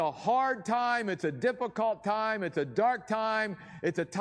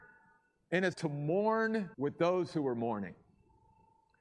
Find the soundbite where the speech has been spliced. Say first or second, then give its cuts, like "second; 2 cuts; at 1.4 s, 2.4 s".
second; 2 cuts; at 0.9 s, 1.9 s